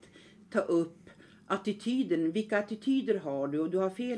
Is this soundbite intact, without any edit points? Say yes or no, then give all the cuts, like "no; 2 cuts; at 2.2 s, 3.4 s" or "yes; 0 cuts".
yes; 0 cuts